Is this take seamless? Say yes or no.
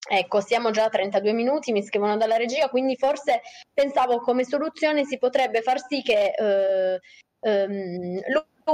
yes